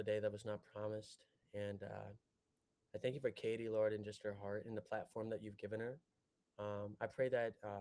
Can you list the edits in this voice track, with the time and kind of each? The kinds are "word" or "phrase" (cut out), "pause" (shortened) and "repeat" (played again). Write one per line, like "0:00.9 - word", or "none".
none